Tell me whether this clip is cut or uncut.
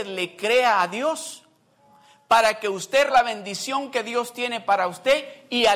cut